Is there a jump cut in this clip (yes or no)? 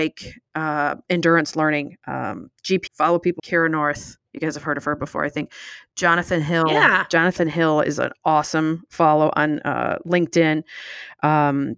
yes